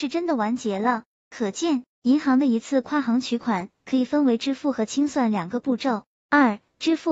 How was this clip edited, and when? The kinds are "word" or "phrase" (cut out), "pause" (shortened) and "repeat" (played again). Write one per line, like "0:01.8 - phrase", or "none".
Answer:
0:01.9 - pause